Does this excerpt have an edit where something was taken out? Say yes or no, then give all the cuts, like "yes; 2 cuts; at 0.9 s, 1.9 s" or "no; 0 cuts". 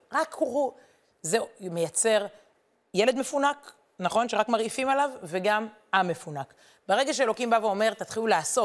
no; 0 cuts